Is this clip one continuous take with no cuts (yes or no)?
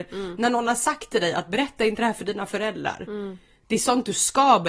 yes